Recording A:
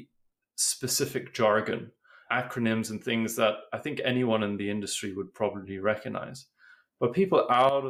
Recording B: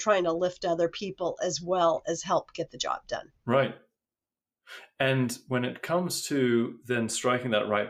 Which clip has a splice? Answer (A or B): B